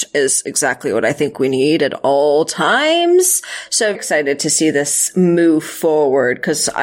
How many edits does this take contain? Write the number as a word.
one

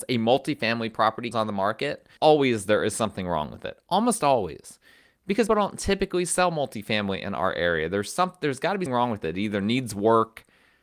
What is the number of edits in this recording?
four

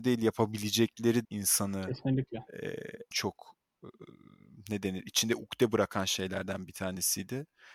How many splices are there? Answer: two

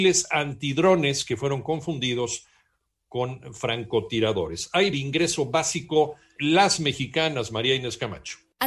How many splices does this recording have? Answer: two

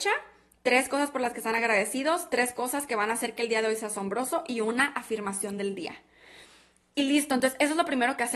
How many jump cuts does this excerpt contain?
zero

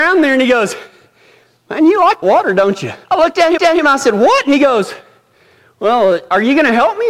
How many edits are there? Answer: three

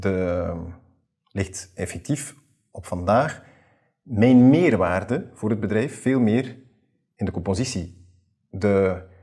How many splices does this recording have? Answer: zero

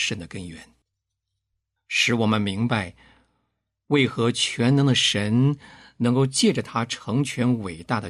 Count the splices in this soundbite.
zero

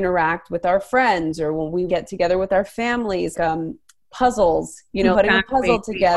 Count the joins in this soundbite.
three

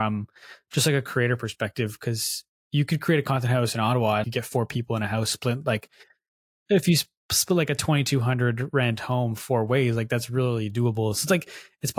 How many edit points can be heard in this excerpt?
one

